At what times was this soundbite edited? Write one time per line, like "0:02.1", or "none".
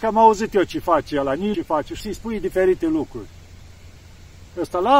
0:01.5
0:02.0